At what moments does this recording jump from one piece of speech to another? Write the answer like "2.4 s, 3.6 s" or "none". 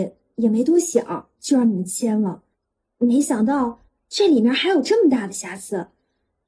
1.3 s, 2.5 s, 3.9 s